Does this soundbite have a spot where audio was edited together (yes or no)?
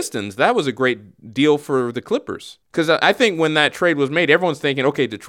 yes